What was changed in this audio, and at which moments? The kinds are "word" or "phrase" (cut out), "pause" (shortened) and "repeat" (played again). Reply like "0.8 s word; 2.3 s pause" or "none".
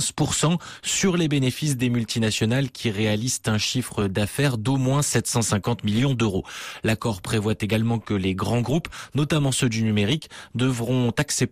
none